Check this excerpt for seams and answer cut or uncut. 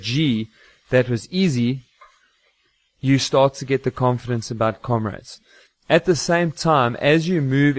uncut